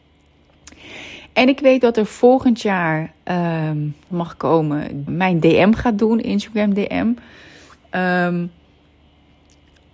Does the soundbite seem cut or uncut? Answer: cut